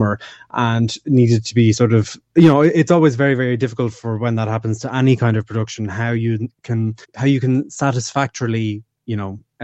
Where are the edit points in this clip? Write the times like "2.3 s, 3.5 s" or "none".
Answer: 2.2 s, 7.0 s